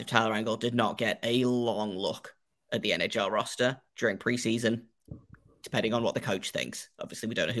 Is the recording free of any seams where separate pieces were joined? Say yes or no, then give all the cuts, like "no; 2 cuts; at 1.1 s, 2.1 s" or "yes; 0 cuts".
no; 1 cut; at 3.9 s